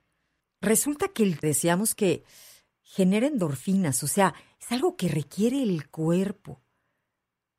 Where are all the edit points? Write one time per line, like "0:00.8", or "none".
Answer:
0:01.4